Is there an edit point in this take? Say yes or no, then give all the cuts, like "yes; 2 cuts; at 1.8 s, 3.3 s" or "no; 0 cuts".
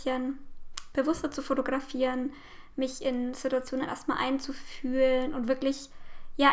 no; 0 cuts